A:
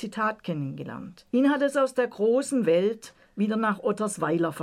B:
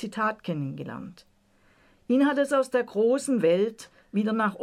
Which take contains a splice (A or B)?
A